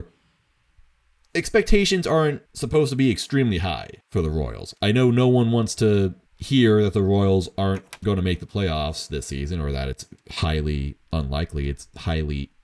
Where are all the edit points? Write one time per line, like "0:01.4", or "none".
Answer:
0:02.4
0:04.0
0:06.3